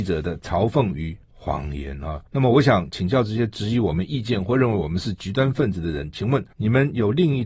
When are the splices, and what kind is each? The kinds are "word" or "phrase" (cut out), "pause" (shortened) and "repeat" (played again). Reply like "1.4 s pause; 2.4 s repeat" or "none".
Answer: 1.2 s pause; 2.3 s pause; 6.5 s pause